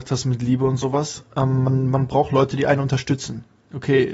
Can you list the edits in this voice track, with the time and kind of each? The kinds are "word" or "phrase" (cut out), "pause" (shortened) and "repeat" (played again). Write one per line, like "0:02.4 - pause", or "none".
none